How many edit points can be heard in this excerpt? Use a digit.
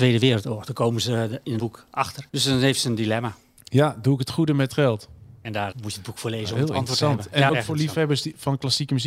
5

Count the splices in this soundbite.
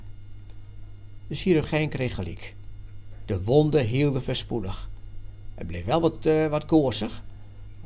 0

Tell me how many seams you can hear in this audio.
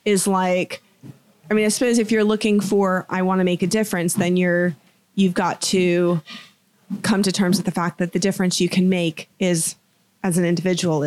1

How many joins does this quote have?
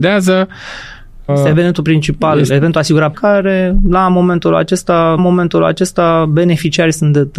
3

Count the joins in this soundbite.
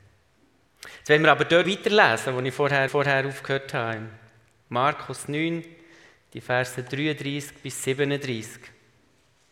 2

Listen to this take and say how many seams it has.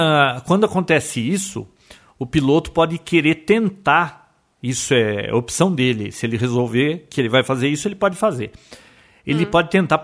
0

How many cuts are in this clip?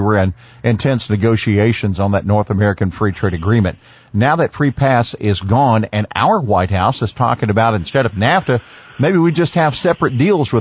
0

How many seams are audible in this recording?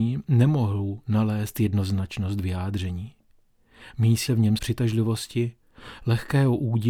2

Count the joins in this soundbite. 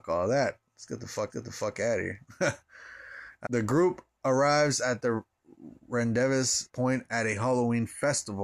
3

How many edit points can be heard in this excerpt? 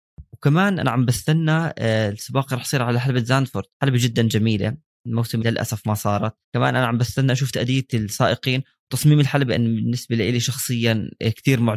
3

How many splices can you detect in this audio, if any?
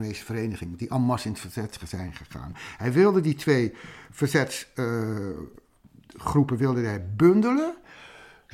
0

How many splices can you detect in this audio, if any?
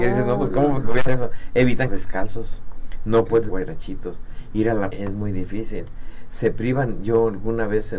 4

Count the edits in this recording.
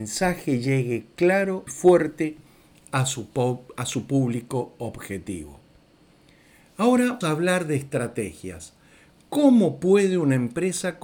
2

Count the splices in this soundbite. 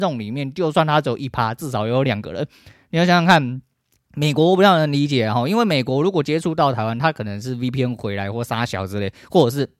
0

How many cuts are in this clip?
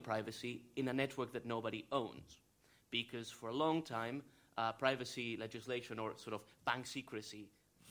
0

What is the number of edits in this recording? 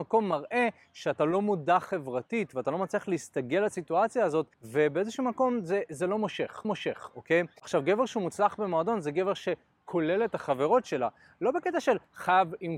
2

